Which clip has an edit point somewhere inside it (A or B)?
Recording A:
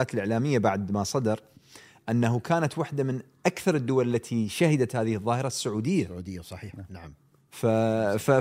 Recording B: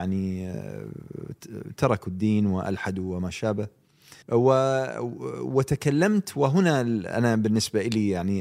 B